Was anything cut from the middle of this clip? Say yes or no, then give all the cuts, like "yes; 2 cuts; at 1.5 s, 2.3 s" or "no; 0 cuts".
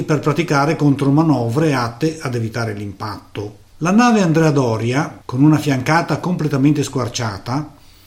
yes; 2 cuts; at 3.7 s, 5.2 s